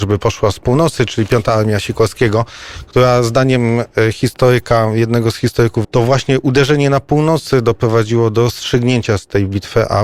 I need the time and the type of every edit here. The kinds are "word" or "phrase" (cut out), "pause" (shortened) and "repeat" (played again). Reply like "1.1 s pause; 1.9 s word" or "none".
5.8 s word